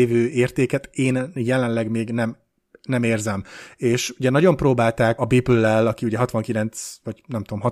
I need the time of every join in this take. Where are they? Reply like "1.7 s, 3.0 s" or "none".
5.2 s